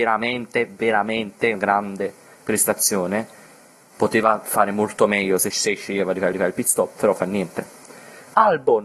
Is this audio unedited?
no; 3 cuts; at 1.5 s, 5.5 s, 6.3 s

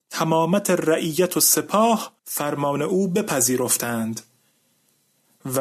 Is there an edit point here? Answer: yes; 1 cut; at 2.2 s

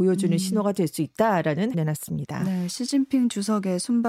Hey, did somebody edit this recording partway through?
yes; 1 cut; at 1.7 s

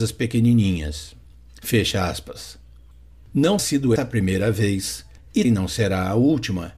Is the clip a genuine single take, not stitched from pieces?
no; 3 cuts; at 3.6 s, 4.0 s, 5.4 s

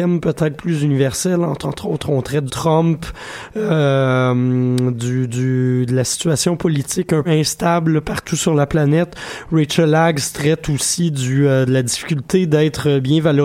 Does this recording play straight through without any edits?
no; 3 cuts; at 1.6 s, 2.5 s, 7.2 s

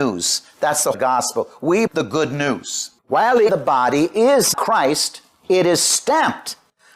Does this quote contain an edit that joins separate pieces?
yes; 5 cuts; at 0.9 s, 1.9 s, 3.0 s, 3.5 s, 4.5 s

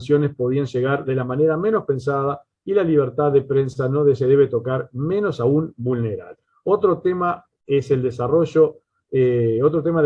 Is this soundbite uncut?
yes; 0 cuts

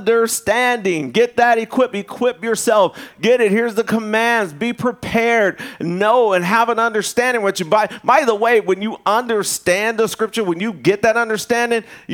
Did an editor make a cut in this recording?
no; 0 cuts

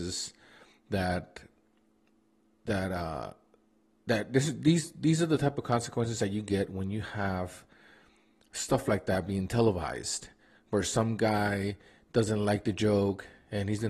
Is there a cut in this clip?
no; 0 cuts

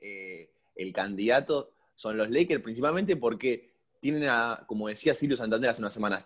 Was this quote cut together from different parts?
no; 0 cuts

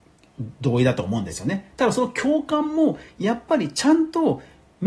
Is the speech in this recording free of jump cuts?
yes; 0 cuts

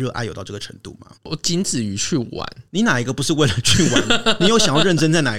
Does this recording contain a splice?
yes; 2 cuts; at 1.2 s, 2.7 s

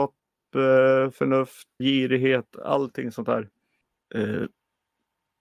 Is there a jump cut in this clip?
yes; 1 cut; at 1.8 s

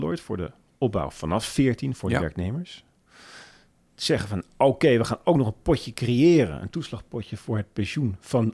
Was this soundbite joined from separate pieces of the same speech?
no; 0 cuts

